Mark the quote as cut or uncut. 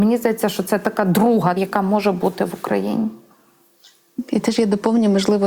cut